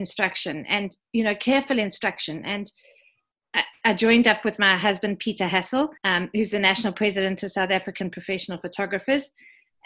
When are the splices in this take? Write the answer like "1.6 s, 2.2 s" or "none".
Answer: 6.0 s